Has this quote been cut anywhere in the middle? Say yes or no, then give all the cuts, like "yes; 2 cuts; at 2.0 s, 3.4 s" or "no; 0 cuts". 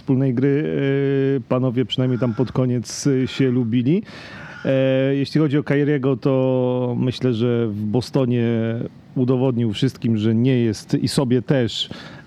no; 0 cuts